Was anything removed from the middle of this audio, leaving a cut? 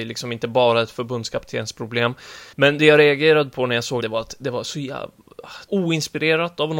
yes; 3 cuts; at 2.5 s, 4.0 s, 5.7 s

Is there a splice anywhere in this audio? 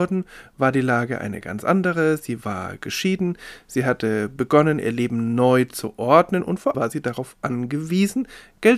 yes; 1 cut; at 6.7 s

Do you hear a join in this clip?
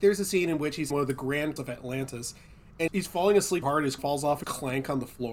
yes; 6 cuts; at 0.9 s, 1.6 s, 2.9 s, 3.6 s, 4.0 s, 4.4 s

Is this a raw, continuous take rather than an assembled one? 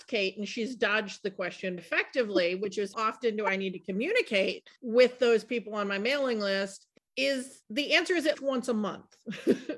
no; 3 cuts; at 1.8 s, 2.9 s, 8.3 s

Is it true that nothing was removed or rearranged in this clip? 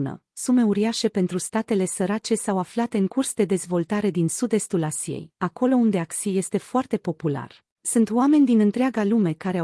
no; 1 cut; at 7.8 s

